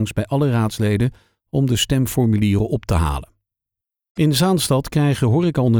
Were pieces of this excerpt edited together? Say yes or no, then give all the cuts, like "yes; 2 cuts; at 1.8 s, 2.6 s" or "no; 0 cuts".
no; 0 cuts